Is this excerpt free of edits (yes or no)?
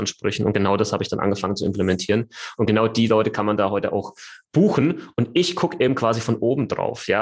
yes